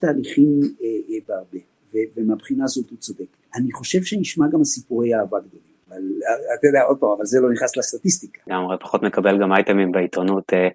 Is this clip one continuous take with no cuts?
no; 2 cuts; at 3.4 s, 5.8 s

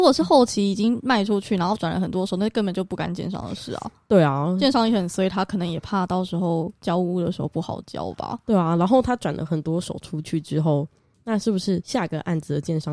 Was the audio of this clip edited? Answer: no; 0 cuts

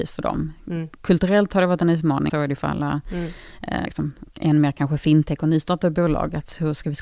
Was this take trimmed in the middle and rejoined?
yes; 2 cuts; at 2.3 s, 3.9 s

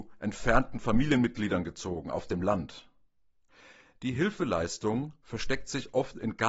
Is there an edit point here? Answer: no; 0 cuts

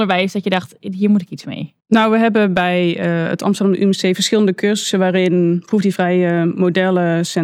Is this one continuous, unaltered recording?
no; 1 cut; at 1.8 s

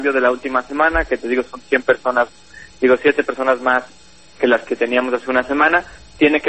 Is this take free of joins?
yes; 0 cuts

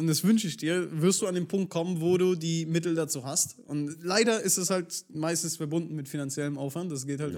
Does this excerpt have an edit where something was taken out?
no; 0 cuts

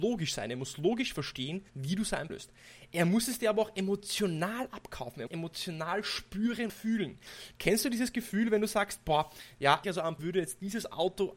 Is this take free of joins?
no; 6 cuts; at 1.7 s, 2.3 s, 5.3 s, 6.7 s, 9.8 s, 10.2 s

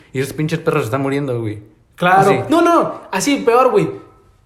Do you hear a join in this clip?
no; 0 cuts

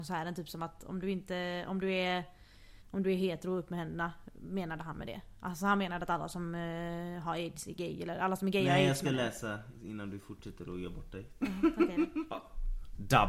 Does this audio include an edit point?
yes; 1 cut; at 2.8 s

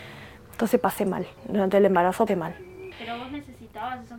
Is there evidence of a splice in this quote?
yes; 2 cuts; at 1.4 s, 2.3 s

